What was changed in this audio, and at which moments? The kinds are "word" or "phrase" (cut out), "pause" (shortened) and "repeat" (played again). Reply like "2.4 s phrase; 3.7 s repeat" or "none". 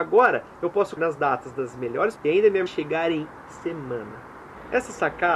1.0 s word; 2.2 s word; 2.7 s word; 3.5 s word